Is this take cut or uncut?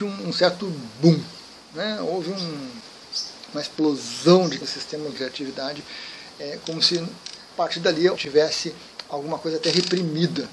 cut